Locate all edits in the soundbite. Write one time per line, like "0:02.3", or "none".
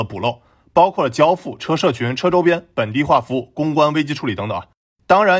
0:01.6